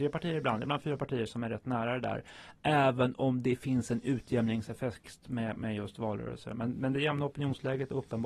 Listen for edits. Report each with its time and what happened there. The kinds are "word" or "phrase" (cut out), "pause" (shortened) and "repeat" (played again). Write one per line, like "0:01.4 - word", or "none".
none